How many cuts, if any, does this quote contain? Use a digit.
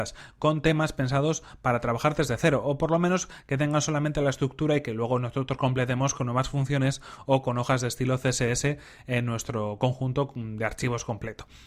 0